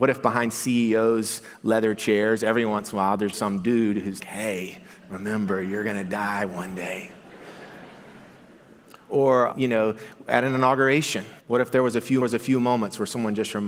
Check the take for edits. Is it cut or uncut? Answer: cut